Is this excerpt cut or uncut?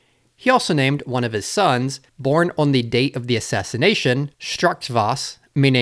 cut